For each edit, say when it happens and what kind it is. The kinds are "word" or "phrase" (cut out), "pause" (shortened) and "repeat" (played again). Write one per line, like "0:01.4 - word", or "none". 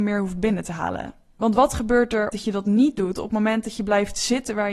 0:02.3 - phrase